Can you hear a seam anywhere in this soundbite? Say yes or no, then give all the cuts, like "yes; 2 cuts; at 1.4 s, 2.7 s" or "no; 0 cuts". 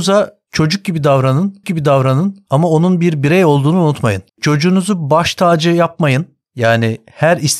yes; 3 cuts; at 1.6 s, 4.3 s, 6.4 s